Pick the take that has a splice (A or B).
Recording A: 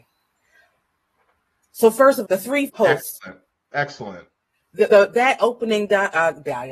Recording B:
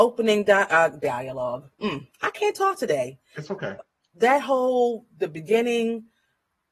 A